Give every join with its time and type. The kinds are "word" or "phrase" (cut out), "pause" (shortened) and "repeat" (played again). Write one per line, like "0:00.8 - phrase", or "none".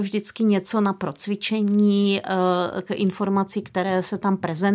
0:02.9 - word